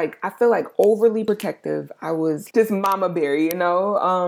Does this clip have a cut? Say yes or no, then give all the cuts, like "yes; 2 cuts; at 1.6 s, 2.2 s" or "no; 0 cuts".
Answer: yes; 1 cut; at 2.5 s